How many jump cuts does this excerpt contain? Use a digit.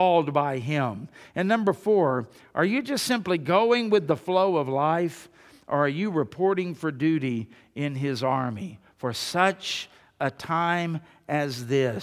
0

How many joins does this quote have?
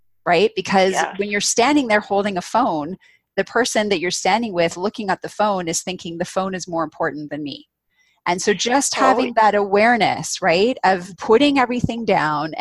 1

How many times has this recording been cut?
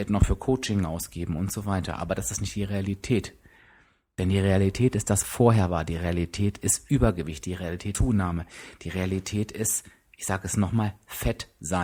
2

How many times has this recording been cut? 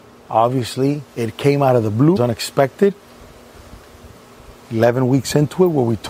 3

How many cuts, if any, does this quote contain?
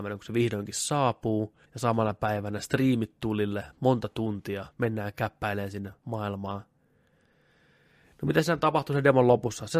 3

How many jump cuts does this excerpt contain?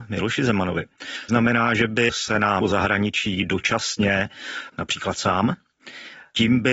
3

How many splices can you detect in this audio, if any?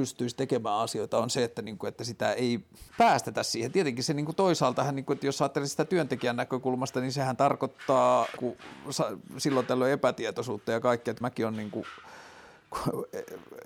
3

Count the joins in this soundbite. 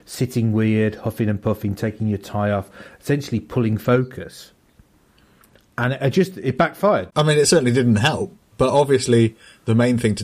0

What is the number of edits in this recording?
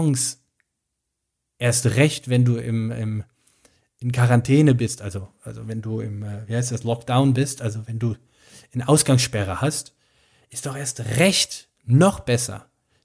0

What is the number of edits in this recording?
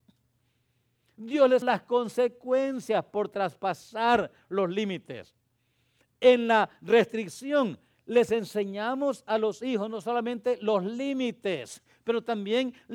1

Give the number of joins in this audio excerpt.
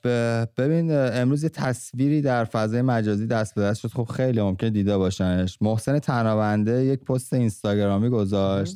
0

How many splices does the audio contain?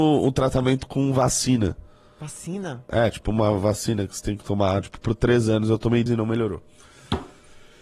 1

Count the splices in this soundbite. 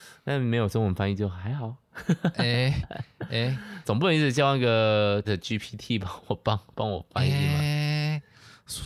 2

